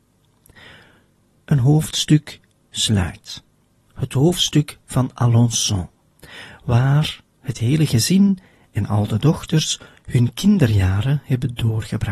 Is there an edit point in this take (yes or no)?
no